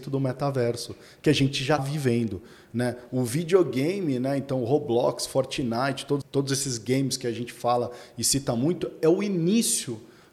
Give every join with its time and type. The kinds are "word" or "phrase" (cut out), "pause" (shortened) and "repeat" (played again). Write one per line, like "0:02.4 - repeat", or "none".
0:01.8 - word
0:06.2 - word